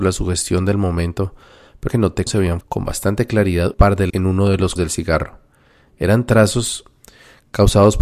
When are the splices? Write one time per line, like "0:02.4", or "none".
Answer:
0:01.9
0:02.3
0:02.6
0:03.7
0:04.1
0:04.8